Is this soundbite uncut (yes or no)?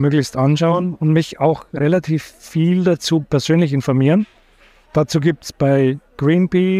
yes